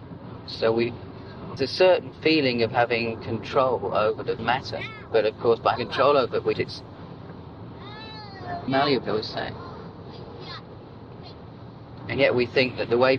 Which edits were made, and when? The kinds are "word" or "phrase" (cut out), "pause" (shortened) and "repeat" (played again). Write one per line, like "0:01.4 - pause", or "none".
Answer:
0:01.6 - word
0:04.4 - word
0:05.8 - word
0:06.5 - word
0:08.7 - word
0:09.0 - word